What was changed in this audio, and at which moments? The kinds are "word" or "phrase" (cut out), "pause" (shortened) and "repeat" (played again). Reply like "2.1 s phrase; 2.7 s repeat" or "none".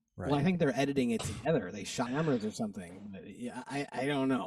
2.1 s phrase